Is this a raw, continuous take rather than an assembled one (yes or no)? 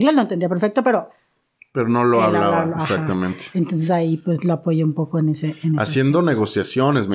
yes